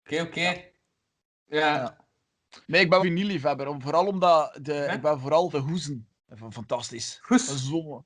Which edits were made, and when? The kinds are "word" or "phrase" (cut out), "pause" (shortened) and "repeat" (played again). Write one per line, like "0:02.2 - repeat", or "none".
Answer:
0:02.6 - pause
0:03.0 - phrase
0:05.5 - phrase
0:06.2 - pause